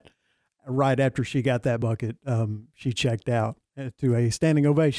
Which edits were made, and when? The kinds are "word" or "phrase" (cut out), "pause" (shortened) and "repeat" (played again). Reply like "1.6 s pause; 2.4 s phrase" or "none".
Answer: none

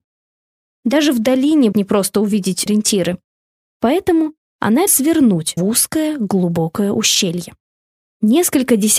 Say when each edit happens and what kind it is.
1.7 s word; 2.7 s word; 4.9 s word; 5.6 s word

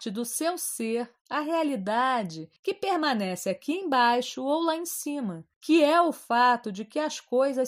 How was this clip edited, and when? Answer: 2.6 s pause; 5.5 s pause

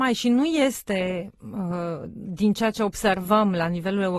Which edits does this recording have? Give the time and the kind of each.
none

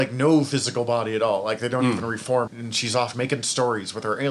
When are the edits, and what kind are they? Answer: 2.5 s word; 3.1 s word

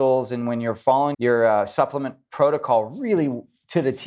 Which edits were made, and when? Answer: 1.1 s word

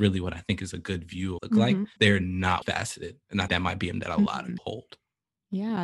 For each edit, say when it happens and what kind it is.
1.4 s phrase; 2.0 s word; 2.6 s word; 3.5 s word; 3.9 s word; 4.6 s word

